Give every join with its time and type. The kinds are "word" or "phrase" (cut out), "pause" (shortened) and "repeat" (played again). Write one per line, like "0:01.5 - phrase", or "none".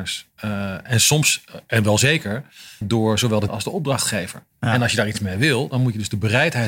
0:02.8 - word
0:03.5 - word
0:04.5 - pause

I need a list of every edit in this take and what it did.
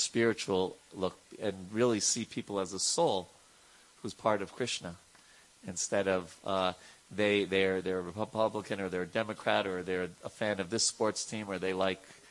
none

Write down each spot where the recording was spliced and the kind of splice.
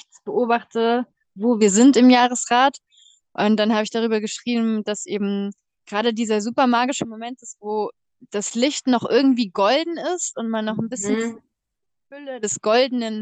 none

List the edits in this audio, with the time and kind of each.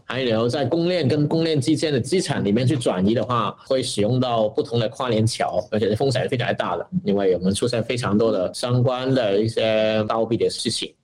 none

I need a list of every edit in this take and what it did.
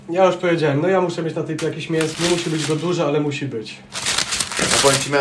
0:01.6 - word
0:02.1 - word

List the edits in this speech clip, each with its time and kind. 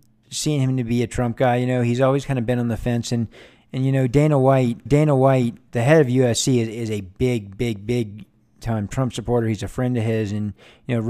0:04.9 - repeat

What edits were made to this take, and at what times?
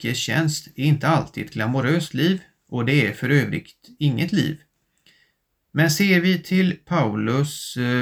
none

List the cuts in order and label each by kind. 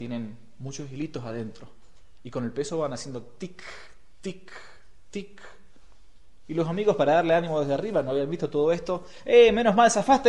none

